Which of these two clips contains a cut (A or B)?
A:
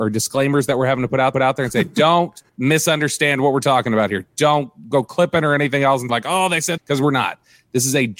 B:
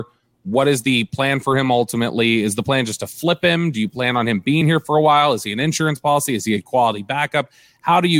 A